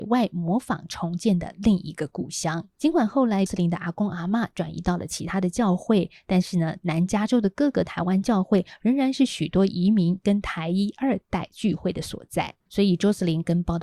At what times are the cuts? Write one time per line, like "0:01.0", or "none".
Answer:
0:02.7
0:03.5
0:12.6